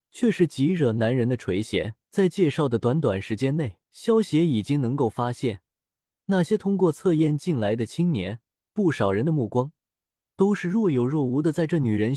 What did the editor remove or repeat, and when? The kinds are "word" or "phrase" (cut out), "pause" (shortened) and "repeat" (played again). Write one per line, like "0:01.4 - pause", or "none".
0:02.0 - pause
0:03.9 - pause
0:08.5 - pause